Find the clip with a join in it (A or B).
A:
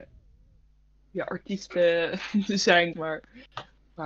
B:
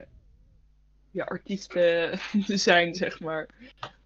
A